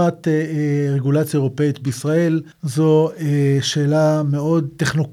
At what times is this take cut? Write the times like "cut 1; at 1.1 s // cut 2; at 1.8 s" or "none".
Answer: cut 1; at 2.5 s